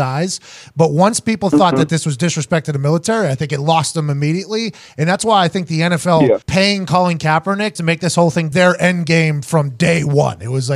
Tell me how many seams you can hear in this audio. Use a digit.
3